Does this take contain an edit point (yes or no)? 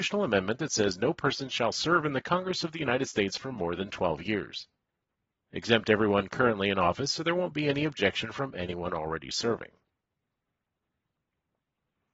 yes